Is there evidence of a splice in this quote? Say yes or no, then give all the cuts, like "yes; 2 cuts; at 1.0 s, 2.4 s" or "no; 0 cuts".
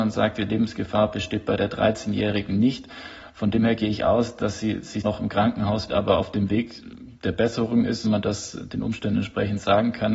yes; 3 cuts; at 5.0 s, 5.9 s, 8.0 s